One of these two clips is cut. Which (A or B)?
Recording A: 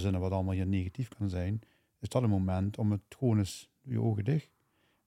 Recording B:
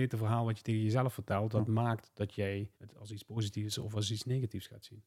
B